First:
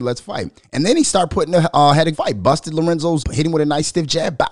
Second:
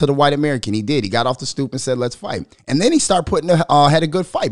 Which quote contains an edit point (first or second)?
first